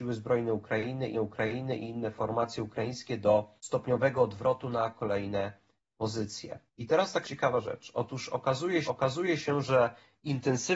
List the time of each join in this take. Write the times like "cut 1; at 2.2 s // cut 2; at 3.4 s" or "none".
cut 1; at 1.1 s // cut 2; at 3.6 s // cut 3; at 6.7 s // cut 4; at 7.2 s // cut 5; at 8.9 s